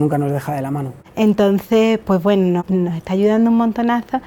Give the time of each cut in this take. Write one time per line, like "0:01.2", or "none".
none